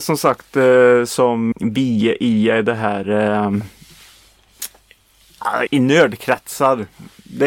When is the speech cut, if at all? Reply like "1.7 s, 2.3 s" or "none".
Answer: 1.5 s, 5.7 s